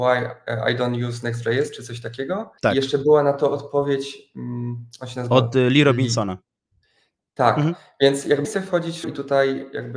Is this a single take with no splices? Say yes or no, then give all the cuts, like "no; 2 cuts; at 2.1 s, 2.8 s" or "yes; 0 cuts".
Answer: no; 3 cuts; at 2.6 s, 8.4 s, 9.0 s